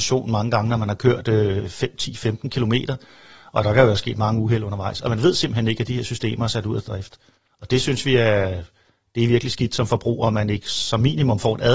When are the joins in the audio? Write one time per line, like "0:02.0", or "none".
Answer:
none